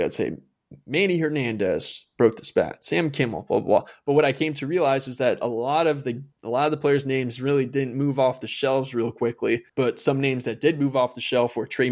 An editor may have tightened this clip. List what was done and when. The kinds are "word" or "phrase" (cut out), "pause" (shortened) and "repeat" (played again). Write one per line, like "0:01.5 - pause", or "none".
0:06.3 - pause
0:09.7 - pause

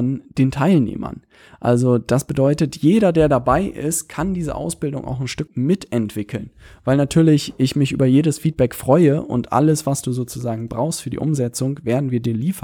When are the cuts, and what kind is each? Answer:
0:05.5 - word

